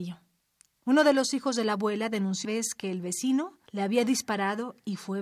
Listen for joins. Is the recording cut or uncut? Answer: cut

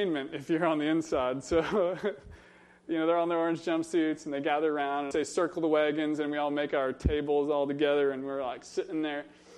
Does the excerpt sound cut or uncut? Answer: cut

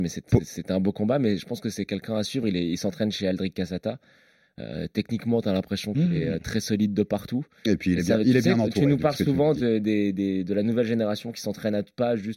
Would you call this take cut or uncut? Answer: uncut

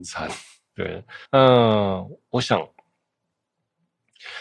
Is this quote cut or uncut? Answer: cut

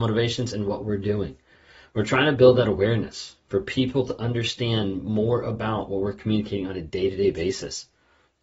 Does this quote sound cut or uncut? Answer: uncut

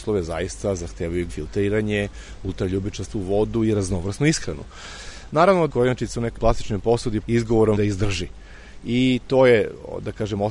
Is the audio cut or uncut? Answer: cut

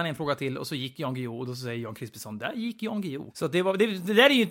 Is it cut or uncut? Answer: cut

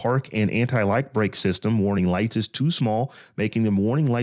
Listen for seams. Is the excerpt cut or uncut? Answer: uncut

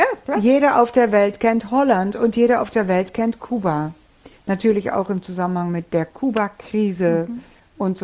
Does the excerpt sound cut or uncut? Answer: cut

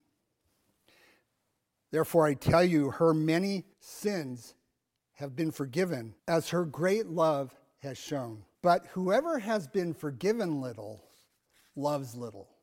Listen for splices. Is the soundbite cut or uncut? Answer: cut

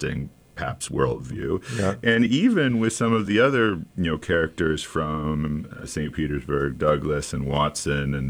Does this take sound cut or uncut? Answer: uncut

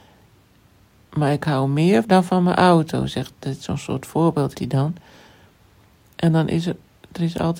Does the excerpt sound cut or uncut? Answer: cut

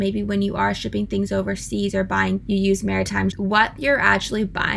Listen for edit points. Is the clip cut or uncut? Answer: cut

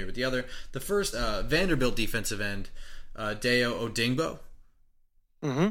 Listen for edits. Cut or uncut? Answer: cut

